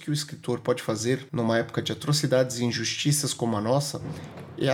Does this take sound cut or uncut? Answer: uncut